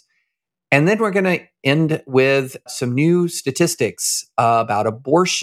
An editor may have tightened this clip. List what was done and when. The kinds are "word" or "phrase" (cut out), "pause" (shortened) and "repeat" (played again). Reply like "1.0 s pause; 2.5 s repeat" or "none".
2.7 s word